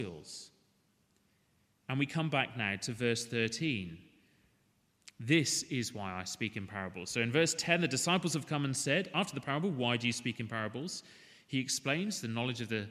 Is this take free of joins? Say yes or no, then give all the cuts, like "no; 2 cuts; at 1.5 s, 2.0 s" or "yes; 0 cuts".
yes; 0 cuts